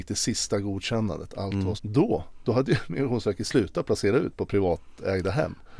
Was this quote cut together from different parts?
yes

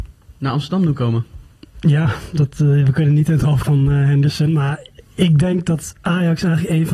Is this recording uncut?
no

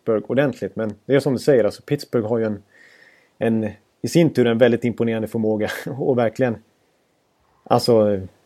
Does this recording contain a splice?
no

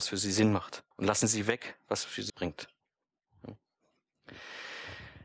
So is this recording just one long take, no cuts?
no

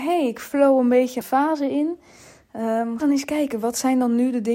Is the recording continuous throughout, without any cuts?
no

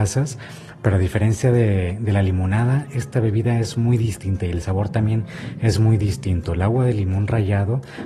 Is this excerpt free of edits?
yes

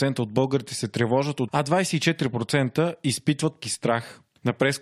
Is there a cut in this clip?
yes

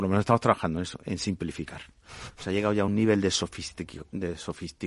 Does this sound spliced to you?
no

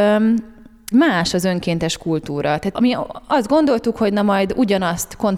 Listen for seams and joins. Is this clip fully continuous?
no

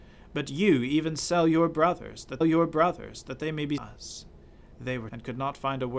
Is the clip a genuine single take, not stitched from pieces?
no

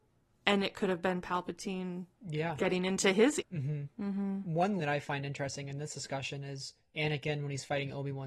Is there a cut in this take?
yes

